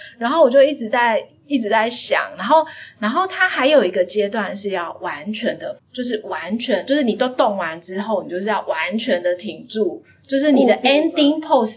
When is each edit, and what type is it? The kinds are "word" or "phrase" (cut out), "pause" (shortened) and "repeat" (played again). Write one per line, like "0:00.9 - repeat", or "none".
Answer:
0:05.8 - word